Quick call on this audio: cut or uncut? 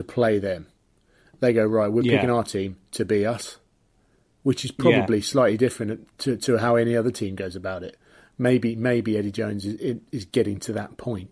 uncut